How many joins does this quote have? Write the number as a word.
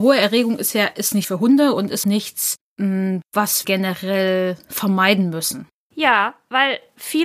three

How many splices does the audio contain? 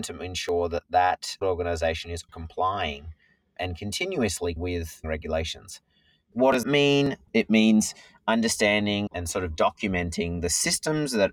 six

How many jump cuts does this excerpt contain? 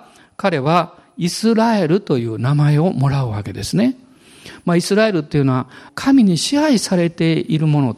one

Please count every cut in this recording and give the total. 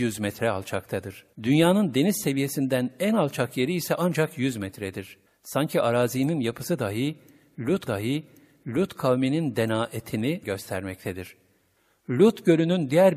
four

